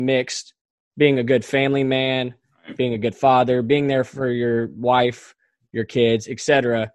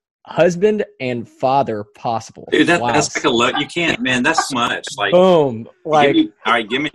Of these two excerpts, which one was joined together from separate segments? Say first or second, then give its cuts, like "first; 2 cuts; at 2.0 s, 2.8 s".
second; 1 cut; at 4.5 s